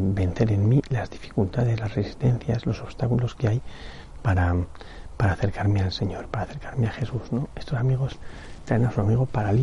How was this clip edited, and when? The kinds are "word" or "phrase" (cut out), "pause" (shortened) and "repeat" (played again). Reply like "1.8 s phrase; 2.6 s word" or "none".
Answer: none